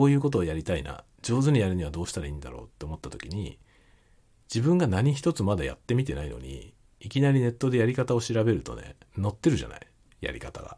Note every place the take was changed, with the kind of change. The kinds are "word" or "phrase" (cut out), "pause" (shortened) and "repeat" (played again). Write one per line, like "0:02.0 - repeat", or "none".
0:01.1 - pause
0:09.0 - pause